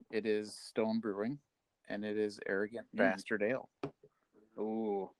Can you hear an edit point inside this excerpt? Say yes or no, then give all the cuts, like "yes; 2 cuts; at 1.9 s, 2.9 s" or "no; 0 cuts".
no; 0 cuts